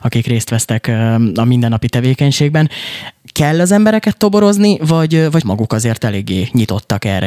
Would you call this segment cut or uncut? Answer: cut